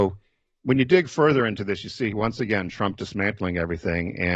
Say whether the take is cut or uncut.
uncut